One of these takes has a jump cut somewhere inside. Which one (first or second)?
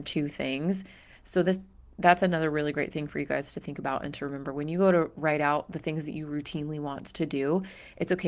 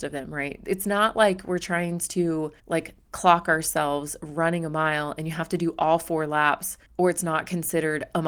second